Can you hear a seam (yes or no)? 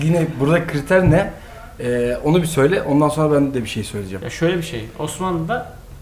no